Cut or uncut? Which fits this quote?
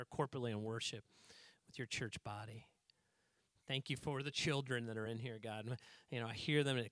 uncut